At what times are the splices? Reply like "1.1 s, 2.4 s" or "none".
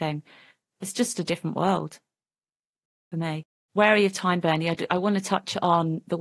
3.5 s